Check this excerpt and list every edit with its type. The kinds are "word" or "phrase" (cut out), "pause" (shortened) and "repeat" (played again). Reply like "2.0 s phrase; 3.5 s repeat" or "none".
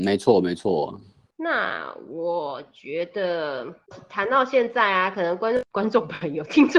none